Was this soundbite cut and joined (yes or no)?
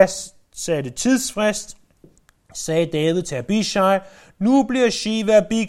no